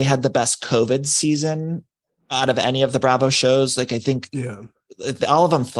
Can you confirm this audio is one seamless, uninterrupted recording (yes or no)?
yes